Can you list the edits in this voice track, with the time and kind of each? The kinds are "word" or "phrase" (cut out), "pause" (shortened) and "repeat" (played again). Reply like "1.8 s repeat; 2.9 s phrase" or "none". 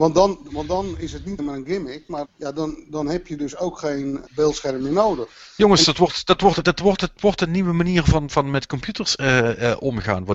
1.4 s word; 2.2 s word; 4.3 s word; 6.6 s word; 8.3 s word